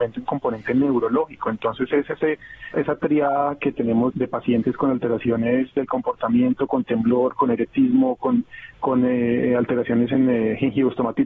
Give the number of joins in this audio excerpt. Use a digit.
2